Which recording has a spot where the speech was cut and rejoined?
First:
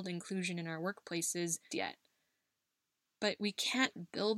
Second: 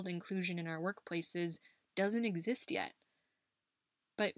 first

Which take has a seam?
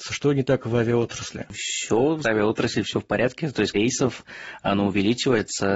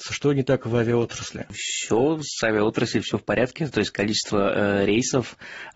first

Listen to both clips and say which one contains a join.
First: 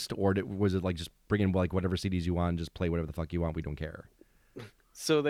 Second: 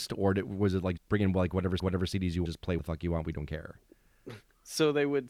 second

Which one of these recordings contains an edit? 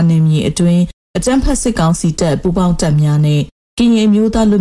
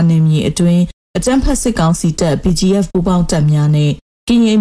first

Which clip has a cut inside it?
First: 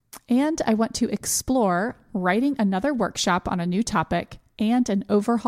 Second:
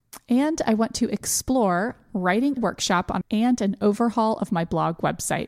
second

